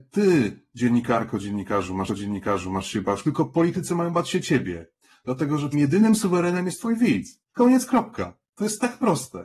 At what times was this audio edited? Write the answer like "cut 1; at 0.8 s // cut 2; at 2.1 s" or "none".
cut 1; at 2.1 s // cut 2; at 3.2 s // cut 3; at 5.7 s // cut 4; at 7.4 s